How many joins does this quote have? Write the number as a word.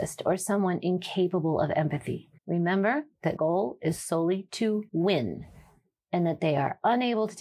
three